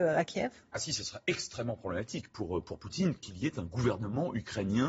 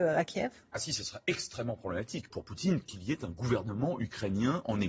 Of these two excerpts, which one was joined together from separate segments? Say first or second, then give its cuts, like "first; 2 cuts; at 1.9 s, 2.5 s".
second; 1 cut; at 2.3 s